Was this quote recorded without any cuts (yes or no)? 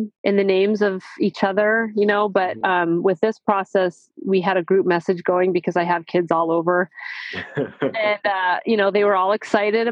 yes